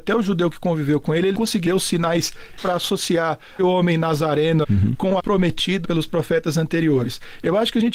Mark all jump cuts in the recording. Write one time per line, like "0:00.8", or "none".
0:01.3
0:01.7
0:02.6
0:03.6
0:04.6
0:05.2
0:05.8